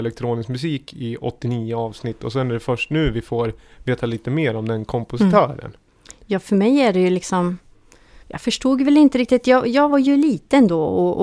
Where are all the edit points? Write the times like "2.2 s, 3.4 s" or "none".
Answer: 8.2 s